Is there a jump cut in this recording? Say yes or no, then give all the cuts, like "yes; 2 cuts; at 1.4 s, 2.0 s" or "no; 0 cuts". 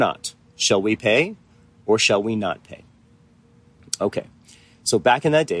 no; 0 cuts